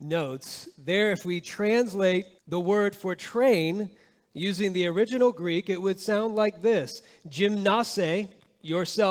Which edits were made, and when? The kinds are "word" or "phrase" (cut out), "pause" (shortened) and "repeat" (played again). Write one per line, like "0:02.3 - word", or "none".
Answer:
0:02.4 - pause